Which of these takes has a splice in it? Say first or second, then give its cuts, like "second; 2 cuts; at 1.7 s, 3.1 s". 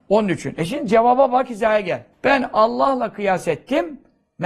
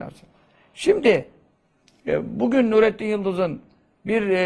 first; 1 cut; at 2.1 s